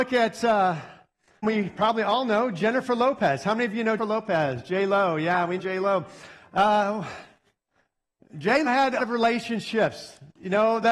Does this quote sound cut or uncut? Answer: cut